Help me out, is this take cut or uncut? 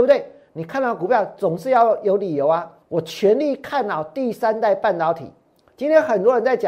cut